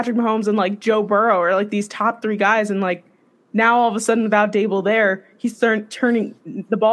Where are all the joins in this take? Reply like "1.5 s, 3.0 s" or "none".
none